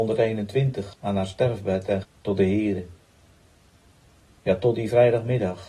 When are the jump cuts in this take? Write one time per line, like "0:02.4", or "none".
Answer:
0:00.9
0:02.0